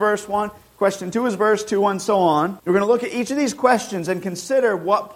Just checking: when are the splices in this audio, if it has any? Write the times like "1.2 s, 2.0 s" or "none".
2.6 s

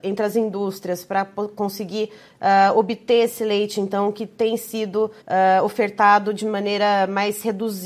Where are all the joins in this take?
5.2 s

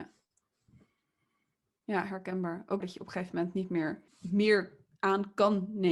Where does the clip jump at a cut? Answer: 2.8 s, 4.1 s

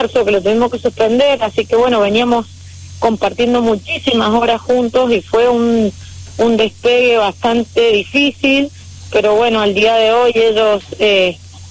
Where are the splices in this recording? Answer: none

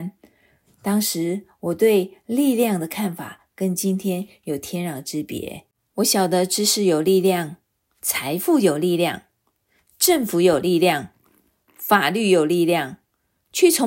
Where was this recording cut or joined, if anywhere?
none

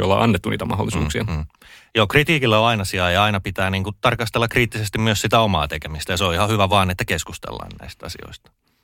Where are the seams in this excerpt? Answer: none

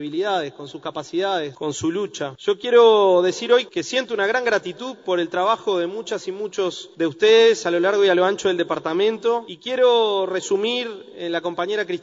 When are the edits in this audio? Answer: none

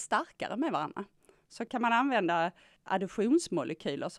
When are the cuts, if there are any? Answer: none

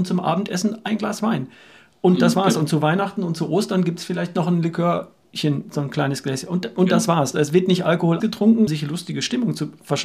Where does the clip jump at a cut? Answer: 8.2 s, 8.7 s

